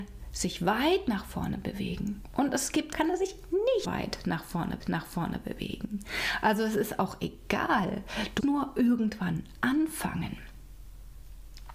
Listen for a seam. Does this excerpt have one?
yes; 4 cuts; at 2.9 s, 3.8 s, 4.8 s, 8.4 s

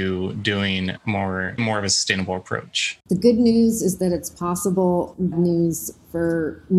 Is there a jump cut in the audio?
yes; 2 cuts; at 1.6 s, 5.3 s

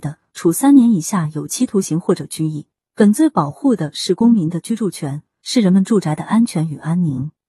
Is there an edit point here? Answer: no; 0 cuts

